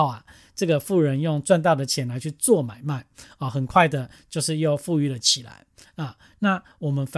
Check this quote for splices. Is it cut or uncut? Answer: uncut